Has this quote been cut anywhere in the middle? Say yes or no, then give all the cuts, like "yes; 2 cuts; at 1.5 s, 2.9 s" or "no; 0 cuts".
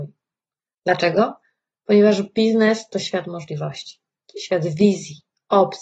no; 0 cuts